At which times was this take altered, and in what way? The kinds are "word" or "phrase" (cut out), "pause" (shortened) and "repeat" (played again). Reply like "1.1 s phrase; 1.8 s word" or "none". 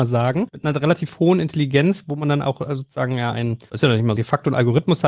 4.2 s word